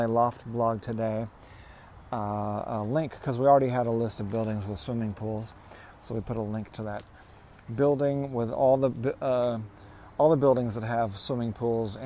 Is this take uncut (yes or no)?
yes